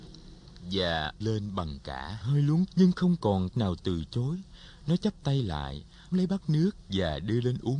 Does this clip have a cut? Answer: yes; 5 cuts; at 1.2 s, 2.2 s, 2.7 s, 3.5 s, 6.1 s

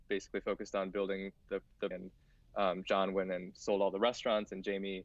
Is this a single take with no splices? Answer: no; 1 cut; at 1.9 s

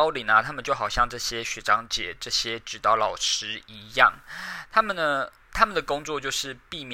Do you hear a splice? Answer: no; 0 cuts

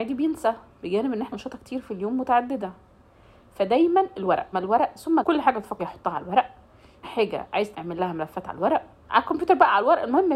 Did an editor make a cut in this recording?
yes; 7 cuts; at 1.3 s, 4.5 s, 5.2 s, 5.8 s, 7.0 s, 7.7 s, 9.0 s

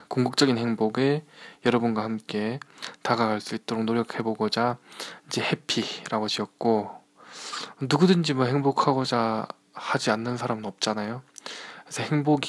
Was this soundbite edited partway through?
no; 0 cuts

